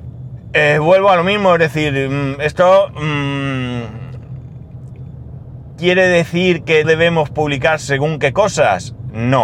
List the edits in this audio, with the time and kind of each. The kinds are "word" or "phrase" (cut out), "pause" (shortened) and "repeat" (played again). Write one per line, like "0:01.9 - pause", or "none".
0:06.8 - word